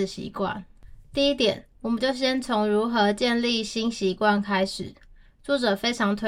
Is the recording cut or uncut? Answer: uncut